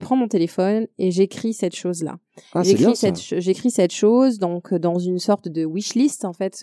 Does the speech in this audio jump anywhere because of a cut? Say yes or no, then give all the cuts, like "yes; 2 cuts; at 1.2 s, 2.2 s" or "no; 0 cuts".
no; 0 cuts